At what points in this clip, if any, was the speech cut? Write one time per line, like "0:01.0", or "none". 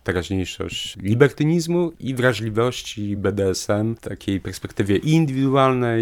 none